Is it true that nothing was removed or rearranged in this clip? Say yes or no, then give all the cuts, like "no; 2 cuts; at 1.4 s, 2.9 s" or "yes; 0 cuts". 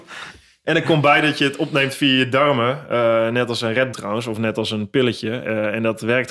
no; 1 cut; at 3.9 s